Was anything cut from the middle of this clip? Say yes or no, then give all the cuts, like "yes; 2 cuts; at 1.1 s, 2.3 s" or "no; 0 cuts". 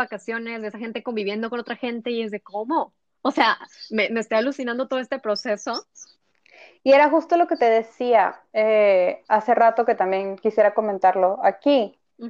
no; 0 cuts